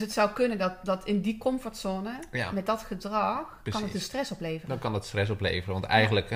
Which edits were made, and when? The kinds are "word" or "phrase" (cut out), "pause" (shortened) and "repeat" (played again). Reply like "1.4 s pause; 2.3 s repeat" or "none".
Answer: none

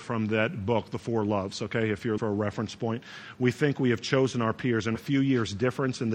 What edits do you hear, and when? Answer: 2.2 s word; 5.0 s word

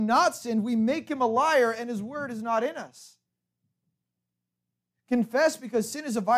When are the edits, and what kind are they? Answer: none

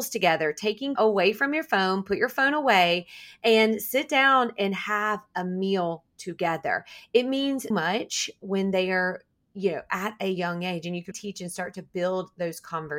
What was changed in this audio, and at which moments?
1.0 s word; 7.7 s word; 11.1 s word

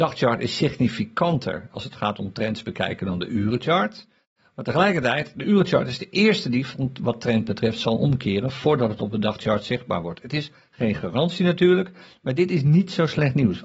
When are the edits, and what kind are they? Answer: none

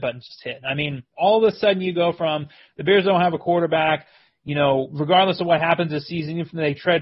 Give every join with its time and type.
none

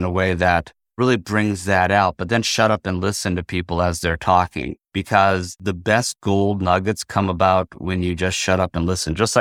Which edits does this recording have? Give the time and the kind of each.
4.8 s pause

